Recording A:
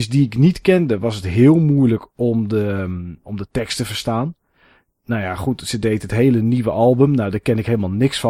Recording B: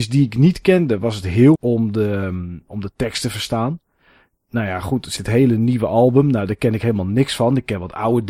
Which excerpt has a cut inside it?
B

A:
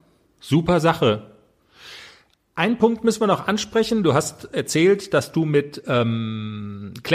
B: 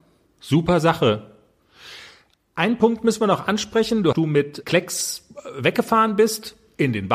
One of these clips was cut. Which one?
B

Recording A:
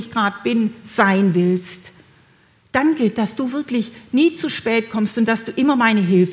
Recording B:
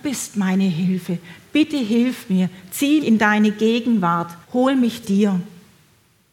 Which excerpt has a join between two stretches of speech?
B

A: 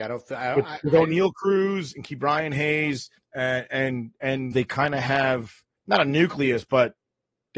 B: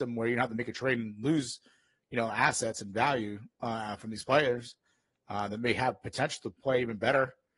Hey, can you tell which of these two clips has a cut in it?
A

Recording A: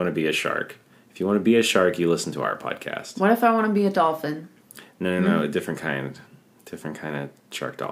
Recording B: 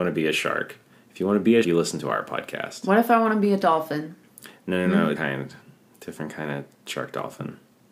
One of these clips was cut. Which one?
B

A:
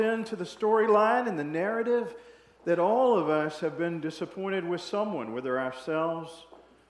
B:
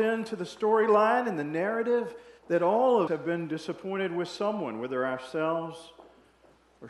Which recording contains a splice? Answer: B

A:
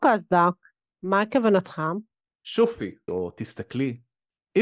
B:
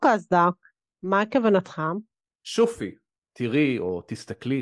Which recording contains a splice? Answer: A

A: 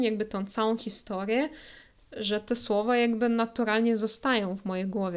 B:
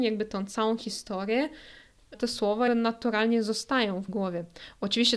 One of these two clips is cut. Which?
B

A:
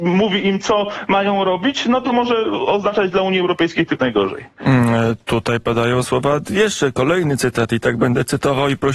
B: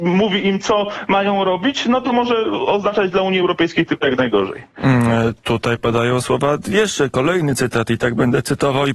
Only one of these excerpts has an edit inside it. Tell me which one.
A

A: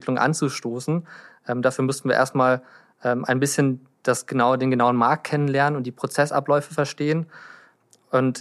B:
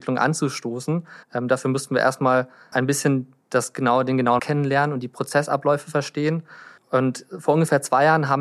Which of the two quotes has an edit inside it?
B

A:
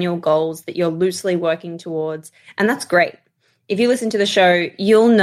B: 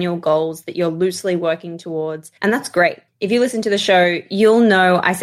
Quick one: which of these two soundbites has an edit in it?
B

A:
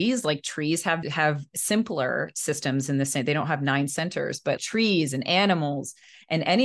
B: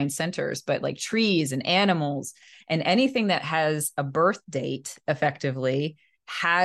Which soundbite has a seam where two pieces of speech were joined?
A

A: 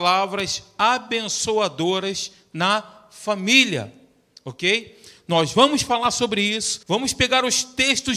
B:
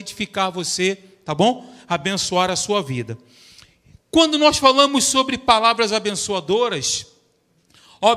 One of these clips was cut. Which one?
A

